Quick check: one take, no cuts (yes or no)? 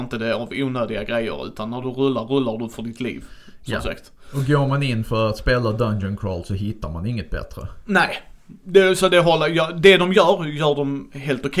yes